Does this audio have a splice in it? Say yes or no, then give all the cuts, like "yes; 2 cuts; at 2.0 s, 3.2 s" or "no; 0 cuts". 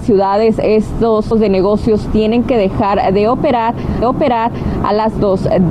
yes; 2 cuts; at 1.3 s, 4.0 s